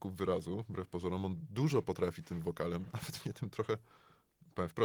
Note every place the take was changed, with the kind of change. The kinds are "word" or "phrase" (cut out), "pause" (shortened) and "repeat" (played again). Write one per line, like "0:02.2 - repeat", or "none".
none